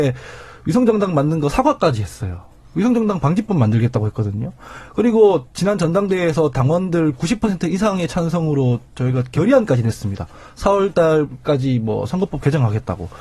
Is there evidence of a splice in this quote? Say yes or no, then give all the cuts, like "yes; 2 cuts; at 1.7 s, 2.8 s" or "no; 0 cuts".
no; 0 cuts